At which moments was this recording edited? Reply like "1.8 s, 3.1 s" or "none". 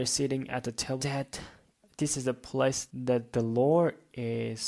1.0 s